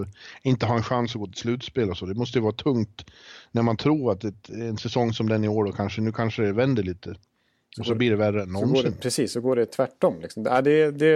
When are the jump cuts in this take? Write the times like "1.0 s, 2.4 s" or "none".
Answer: none